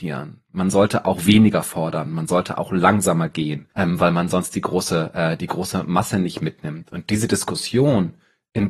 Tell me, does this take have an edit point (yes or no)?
yes